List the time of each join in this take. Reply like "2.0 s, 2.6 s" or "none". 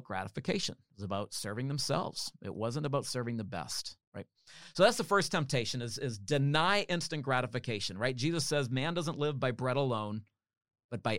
4.0 s